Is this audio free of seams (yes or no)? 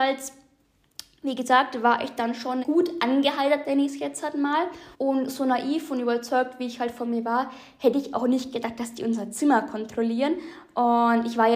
no